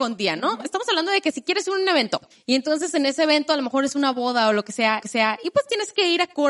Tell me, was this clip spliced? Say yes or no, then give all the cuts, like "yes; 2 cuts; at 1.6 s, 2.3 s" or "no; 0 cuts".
yes; 2 cuts; at 2.3 s, 5.0 s